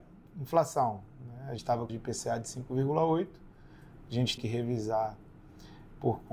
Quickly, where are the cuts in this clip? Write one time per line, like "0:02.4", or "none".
0:01.6
0:01.9
0:04.4